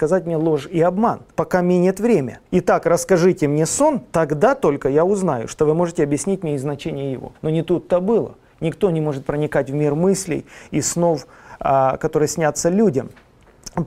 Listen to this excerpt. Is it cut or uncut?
cut